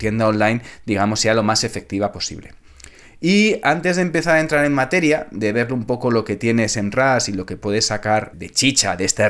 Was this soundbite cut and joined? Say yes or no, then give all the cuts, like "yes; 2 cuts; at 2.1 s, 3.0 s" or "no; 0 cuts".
yes; 1 cut; at 8.3 s